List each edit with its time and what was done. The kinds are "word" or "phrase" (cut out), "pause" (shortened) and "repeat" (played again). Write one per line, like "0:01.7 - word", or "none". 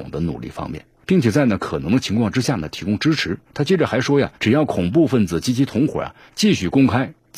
0:01.0 - pause
0:03.4 - pause
0:04.3 - pause